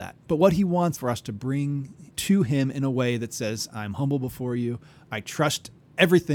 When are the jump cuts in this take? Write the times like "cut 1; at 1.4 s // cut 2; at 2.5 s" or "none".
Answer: cut 1; at 0.9 s // cut 2; at 2.1 s